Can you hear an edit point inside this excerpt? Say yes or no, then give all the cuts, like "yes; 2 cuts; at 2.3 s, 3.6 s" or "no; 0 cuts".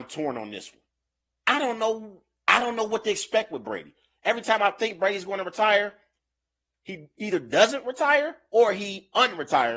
no; 0 cuts